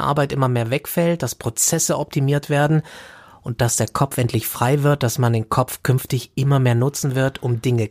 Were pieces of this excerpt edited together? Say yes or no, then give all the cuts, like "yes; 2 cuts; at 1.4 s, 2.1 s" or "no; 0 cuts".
no; 0 cuts